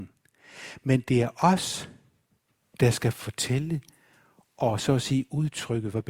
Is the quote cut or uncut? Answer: uncut